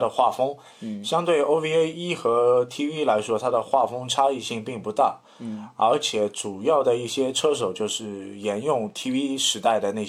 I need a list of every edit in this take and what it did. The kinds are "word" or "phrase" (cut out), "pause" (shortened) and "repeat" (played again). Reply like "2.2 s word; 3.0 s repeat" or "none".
none

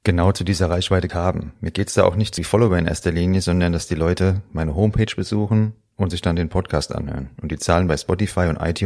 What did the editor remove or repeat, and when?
1.1 s word; 2.4 s word

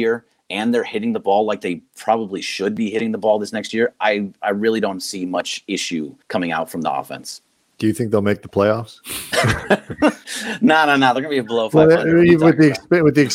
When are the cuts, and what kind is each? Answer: 6.2 s pause

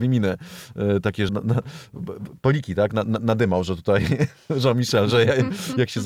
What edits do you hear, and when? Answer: 1.3 s word

